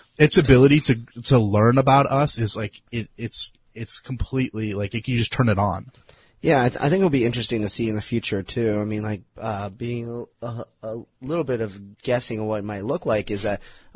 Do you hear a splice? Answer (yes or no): yes